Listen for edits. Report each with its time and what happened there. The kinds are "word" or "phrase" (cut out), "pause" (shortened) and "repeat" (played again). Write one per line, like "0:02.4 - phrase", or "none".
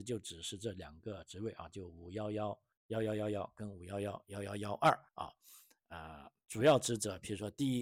0:02.7 - pause
0:05.1 - pause